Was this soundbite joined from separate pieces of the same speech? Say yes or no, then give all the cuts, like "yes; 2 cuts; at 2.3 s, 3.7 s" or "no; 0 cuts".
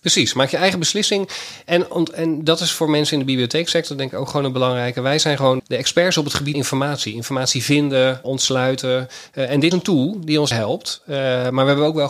yes; 5 cuts; at 5.6 s, 6.5 s, 8.2 s, 9.7 s, 10.5 s